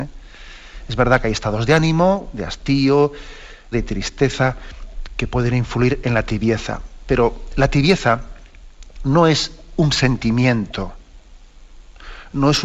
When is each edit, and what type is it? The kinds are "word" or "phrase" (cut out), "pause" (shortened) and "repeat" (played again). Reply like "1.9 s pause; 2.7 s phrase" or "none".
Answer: 3.7 s phrase